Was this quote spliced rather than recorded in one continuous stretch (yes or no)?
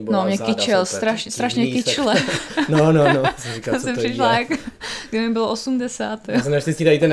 no